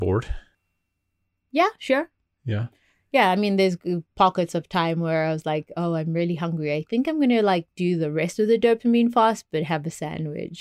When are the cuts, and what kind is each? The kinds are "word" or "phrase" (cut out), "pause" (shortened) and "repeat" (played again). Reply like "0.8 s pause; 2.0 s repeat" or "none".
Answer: none